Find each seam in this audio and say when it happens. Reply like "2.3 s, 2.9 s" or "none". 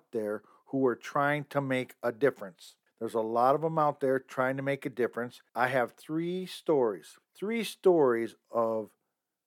2.9 s, 5.5 s, 7.2 s